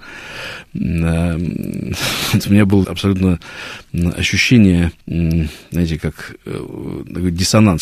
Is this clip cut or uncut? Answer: cut